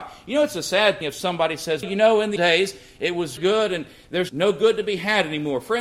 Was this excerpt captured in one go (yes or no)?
no